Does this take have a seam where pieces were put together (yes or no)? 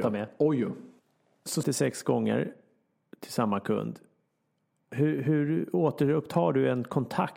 yes